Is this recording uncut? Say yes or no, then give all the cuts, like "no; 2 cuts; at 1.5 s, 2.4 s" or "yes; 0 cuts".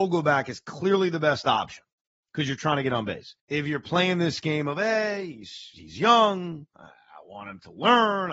no; 1 cut; at 3.4 s